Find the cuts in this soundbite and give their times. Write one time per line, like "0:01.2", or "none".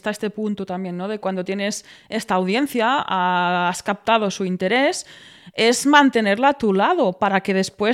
none